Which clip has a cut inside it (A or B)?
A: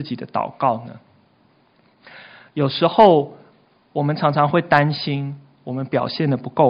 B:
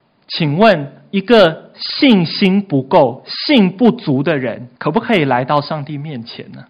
B